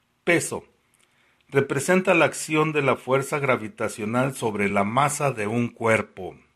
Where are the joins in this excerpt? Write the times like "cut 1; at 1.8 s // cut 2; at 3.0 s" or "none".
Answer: none